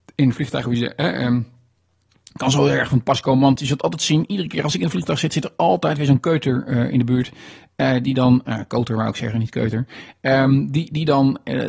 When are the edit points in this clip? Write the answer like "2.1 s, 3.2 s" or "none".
none